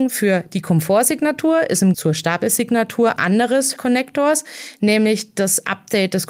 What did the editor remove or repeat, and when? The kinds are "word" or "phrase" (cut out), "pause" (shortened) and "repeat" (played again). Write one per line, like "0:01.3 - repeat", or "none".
0:01.9 - word
0:03.2 - word
0:03.8 - phrase